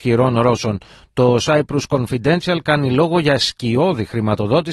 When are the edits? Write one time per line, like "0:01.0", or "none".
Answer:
none